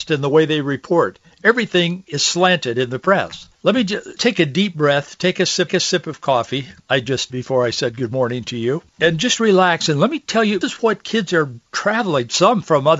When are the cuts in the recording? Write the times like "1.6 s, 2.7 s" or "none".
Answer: 3.5 s, 4.2 s, 5.7 s, 6.8 s, 7.3 s, 8.9 s, 10.6 s